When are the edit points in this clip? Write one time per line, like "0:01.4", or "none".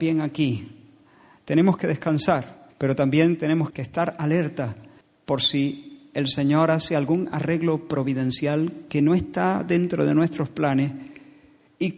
0:02.7
0:03.7
0:05.0